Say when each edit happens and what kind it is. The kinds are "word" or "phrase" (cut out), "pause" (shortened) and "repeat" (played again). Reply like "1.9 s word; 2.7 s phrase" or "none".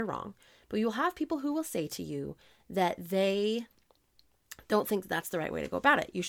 none